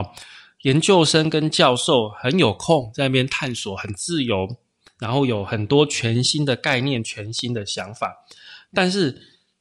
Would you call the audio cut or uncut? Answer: uncut